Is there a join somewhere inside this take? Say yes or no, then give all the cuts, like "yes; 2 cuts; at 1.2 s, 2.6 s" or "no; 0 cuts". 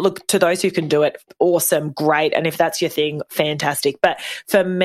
no; 0 cuts